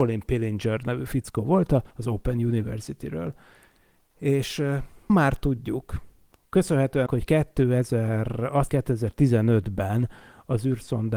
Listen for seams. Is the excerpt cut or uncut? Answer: cut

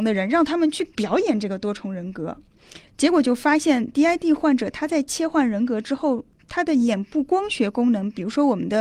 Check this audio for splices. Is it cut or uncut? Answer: uncut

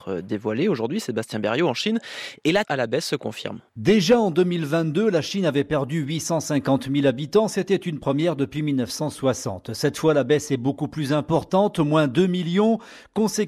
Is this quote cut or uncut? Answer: cut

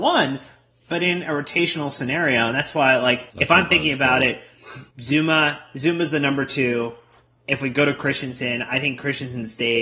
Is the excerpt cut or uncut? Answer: cut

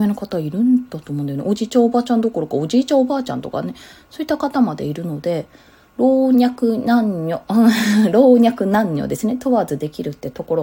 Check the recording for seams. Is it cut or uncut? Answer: uncut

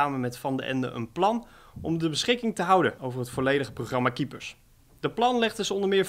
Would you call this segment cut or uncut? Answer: uncut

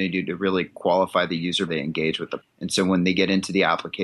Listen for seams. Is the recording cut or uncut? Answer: cut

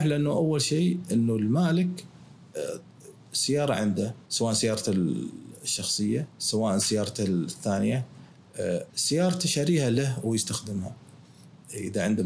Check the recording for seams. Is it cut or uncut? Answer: cut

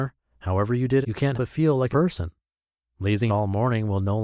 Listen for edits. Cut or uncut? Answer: cut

